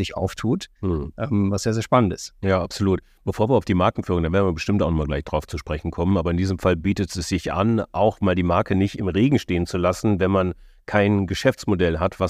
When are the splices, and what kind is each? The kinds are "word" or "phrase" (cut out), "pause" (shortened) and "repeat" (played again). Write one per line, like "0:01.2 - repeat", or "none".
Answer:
none